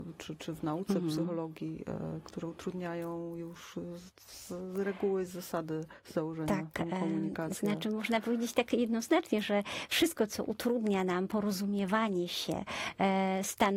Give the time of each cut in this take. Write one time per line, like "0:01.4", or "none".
none